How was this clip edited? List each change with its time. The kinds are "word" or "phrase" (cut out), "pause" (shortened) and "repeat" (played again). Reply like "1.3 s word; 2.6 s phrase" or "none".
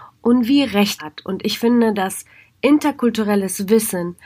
1.0 s word